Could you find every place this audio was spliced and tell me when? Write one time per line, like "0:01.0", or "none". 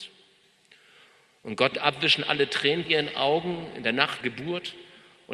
0:01.7
0:02.8
0:04.2